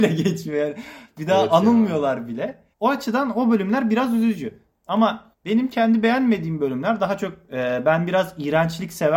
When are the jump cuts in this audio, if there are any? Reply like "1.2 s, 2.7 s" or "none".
2.7 s, 5.3 s